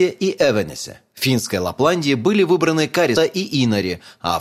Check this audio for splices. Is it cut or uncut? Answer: cut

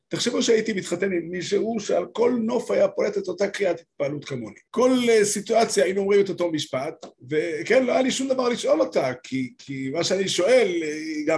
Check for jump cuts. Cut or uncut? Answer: cut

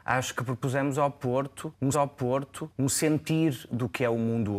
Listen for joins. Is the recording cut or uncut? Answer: cut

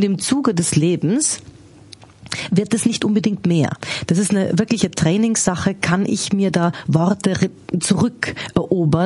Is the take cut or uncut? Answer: uncut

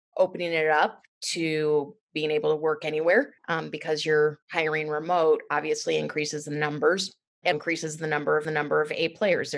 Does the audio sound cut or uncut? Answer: cut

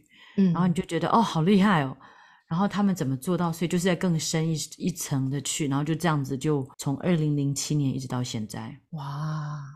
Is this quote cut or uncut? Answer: cut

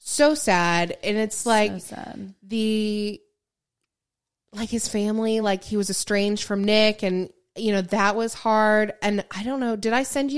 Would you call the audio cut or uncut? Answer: uncut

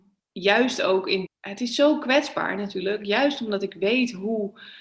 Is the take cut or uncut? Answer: cut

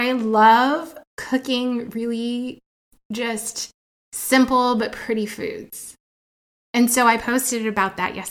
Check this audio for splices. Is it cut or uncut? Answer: uncut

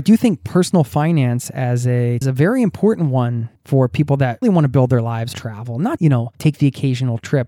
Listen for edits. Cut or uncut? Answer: cut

